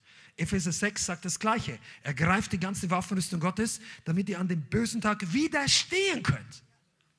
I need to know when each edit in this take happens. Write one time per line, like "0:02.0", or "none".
none